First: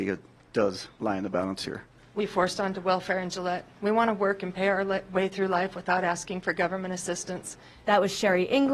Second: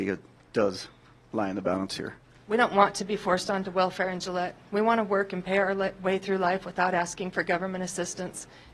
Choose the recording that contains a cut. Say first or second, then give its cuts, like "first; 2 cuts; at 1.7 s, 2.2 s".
first; 2 cuts; at 1.0 s, 2.2 s